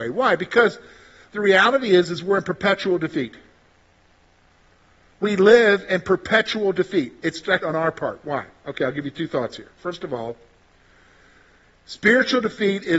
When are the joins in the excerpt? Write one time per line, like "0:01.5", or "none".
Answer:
0:07.6